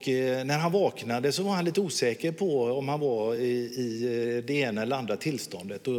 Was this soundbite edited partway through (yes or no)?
no